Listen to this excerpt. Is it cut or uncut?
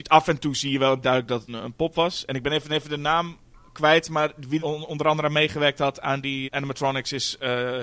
cut